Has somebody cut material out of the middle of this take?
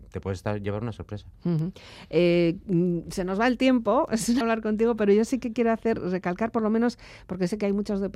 yes; 1 cut; at 4.4 s

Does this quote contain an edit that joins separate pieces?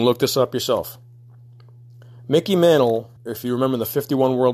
yes; 1 cut; at 3.2 s

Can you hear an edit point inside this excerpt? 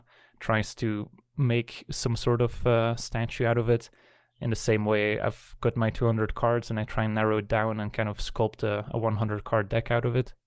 no; 0 cuts

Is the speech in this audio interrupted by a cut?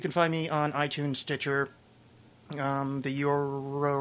no; 0 cuts

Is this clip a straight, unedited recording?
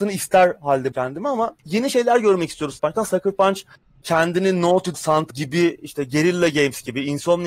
no; 6 cuts; at 0.9 s, 1.6 s, 2.8 s, 4.0 s, 4.9 s, 5.3 s

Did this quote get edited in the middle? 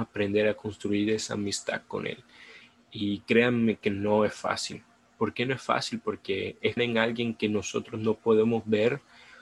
yes; 1 cut; at 6.8 s

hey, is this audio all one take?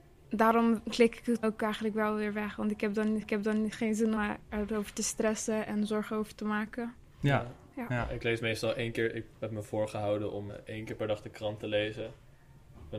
no; 4 cuts; at 1.4 s, 3.2 s, 4.2 s, 10.5 s

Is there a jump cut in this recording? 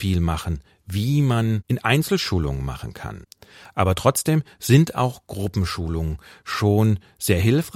no; 0 cuts

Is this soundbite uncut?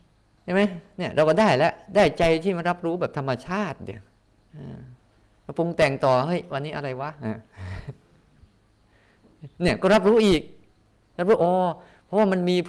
yes; 0 cuts

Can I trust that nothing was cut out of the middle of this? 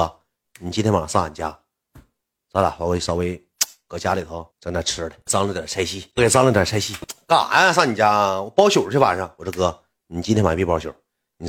no; 1 cut; at 4.5 s

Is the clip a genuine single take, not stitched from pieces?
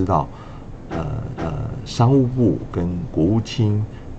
no; 1 cut; at 1.3 s

